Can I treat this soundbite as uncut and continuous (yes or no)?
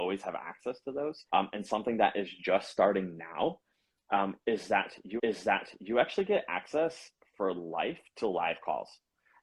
no